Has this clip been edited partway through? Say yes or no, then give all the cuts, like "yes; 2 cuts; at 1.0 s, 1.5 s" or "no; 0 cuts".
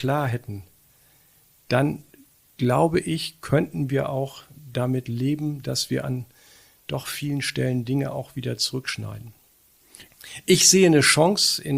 no; 0 cuts